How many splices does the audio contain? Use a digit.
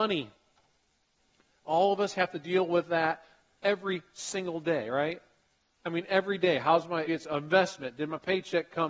1